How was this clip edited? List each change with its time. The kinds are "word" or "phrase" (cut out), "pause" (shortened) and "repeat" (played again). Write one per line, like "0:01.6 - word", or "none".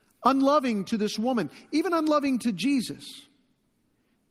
none

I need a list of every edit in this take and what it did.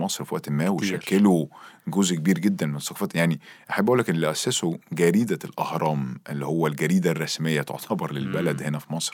none

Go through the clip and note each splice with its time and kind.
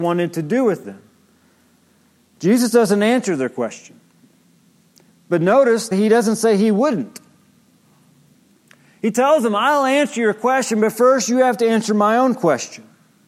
0:05.9 - word

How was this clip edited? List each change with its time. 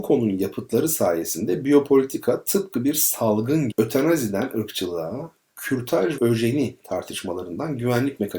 0:03.7 - word
0:06.2 - word

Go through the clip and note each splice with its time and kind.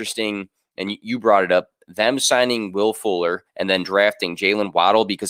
0:03.5 - pause

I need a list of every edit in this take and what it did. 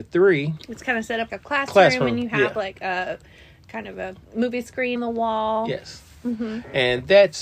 0:01.3 - word
0:04.3 - pause
0:05.0 - word

